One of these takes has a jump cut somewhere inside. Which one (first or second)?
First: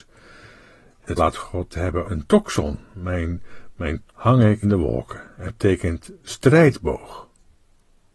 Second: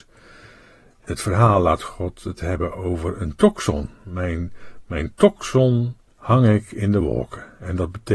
first